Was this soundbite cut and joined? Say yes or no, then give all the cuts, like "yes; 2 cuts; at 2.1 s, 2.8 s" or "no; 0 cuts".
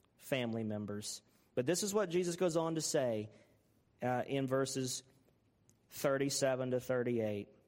no; 0 cuts